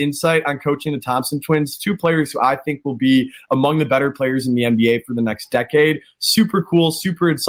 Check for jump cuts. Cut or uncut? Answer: uncut